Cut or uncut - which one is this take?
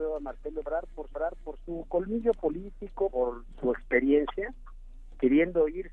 cut